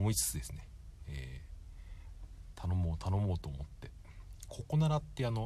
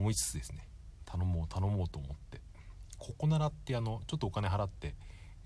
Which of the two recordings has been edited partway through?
second; 1 cut; at 1.0 s

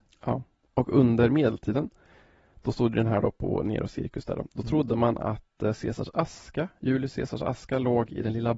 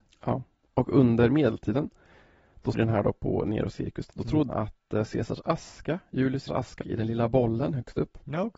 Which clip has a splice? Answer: second; 5 cuts; at 2.7 s, 4.1 s, 4.5 s, 6.5 s, 6.8 s

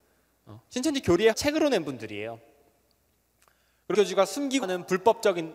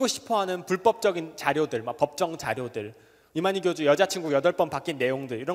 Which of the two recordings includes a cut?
first; 3 cuts; at 1.3 s, 3.9 s, 4.6 s

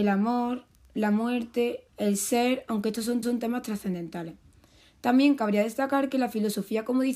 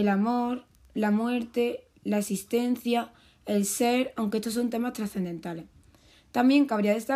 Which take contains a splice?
first; 2 cuts; at 1.9 s, 3.2 s

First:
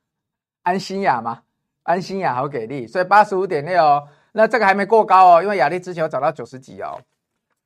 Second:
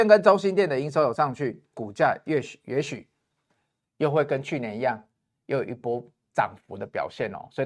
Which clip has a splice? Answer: second; 1 cut; at 1.7 s

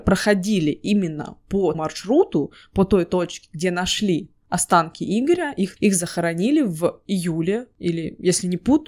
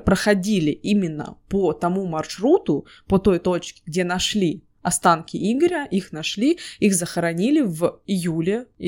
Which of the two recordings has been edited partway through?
first; 2 cuts; at 1.7 s, 5.8 s

